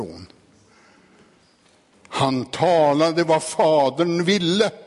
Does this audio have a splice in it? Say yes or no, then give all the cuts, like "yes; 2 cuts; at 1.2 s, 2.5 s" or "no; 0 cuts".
no; 0 cuts